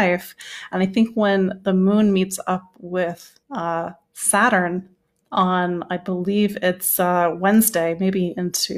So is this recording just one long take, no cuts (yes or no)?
no